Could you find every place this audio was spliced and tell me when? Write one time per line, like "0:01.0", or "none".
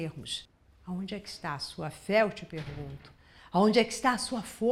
none